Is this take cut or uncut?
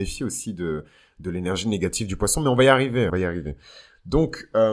cut